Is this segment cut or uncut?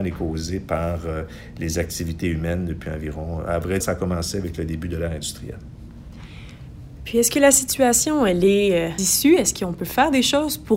cut